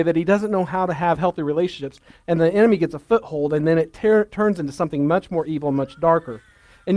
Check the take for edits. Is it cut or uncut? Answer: uncut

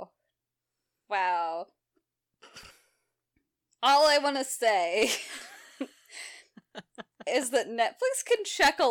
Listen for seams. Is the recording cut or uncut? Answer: uncut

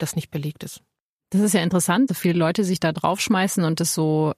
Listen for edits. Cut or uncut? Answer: cut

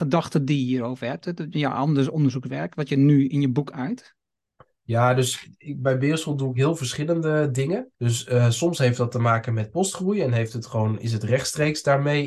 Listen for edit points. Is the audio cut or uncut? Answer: cut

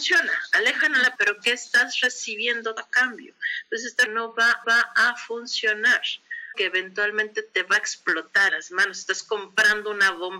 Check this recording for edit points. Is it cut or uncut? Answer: cut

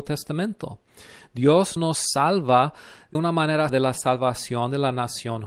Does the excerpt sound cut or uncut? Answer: cut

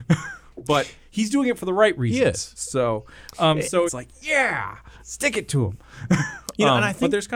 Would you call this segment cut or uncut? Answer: cut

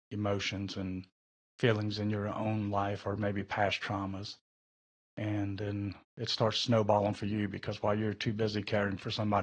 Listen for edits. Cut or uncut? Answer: uncut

